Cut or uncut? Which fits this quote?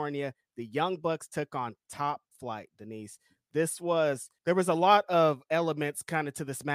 uncut